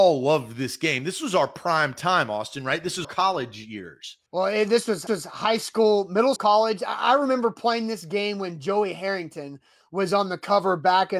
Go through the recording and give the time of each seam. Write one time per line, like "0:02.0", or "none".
0:03.0
0:04.3
0:05.1
0:06.4